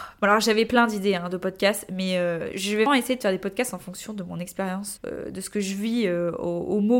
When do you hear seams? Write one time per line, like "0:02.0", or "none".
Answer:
0:02.5
0:02.9
0:05.0